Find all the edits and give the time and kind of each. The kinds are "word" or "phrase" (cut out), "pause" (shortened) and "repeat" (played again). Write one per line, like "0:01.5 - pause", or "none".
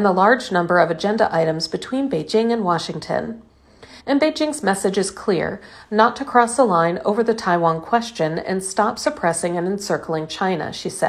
0:04.0 - pause

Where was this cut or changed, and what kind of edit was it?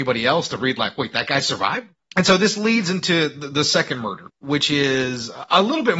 0:02.0 - pause
0:04.3 - word

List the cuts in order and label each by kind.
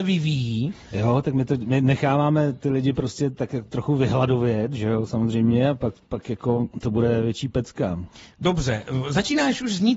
0:06.7 - pause

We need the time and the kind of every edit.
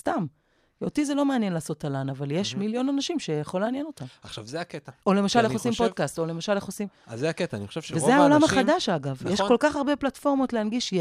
0:05.0 - pause

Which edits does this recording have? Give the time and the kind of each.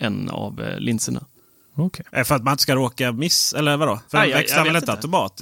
0:02.1 - pause
0:04.1 - pause

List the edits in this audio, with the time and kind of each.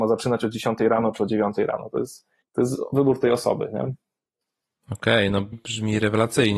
0:02.4 - pause
0:05.5 - word

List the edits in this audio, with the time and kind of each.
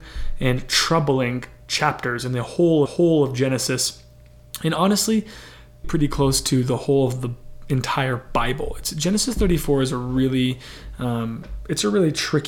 0:02.9 - repeat
0:05.8 - word

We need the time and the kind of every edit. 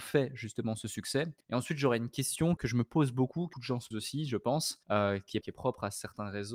0:01.4 - pause
0:02.6 - word
0:03.5 - word
0:03.9 - word
0:04.8 - pause
0:05.4 - word

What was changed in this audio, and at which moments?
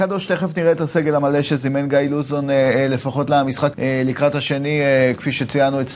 0:03.7 - word

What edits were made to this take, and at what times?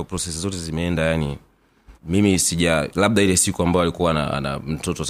0:02.0 - pause

